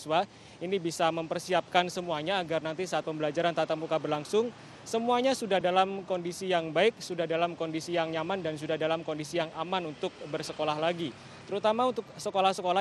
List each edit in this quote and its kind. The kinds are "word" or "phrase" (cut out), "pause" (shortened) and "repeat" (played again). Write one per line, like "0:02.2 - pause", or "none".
none